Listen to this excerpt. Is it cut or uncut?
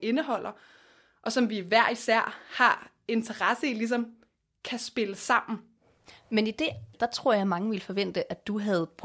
cut